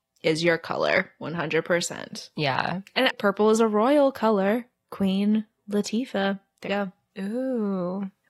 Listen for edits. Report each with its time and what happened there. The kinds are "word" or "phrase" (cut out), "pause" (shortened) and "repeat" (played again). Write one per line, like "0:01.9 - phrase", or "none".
0:03.1 - word
0:06.7 - word

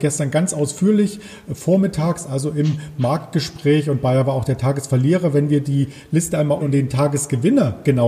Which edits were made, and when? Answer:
0:06.6 - word

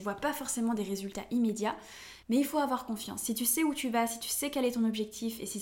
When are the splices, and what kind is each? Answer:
0:02.2 - pause

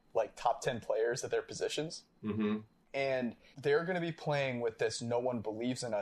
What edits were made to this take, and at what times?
0:03.5 - word

